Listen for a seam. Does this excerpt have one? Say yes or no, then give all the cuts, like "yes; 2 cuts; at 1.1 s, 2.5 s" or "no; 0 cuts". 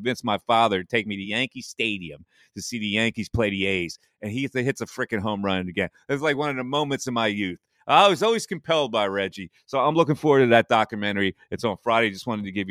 no; 0 cuts